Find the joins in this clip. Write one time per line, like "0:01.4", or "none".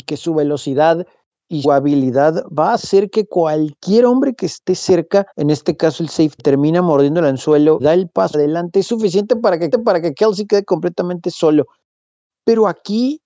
0:01.6
0:05.3
0:06.4
0:07.8
0:08.3
0:09.7